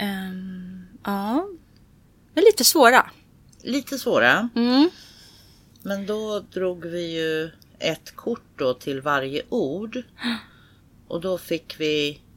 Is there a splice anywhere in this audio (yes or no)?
no